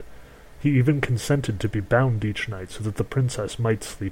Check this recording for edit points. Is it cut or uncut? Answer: uncut